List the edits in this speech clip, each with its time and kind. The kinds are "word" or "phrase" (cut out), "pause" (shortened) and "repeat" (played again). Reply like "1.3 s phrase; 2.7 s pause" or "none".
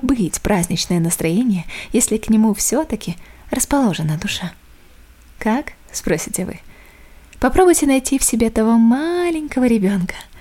none